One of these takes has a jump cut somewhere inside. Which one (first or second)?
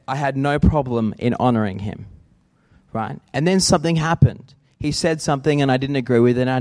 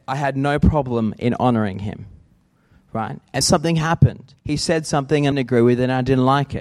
second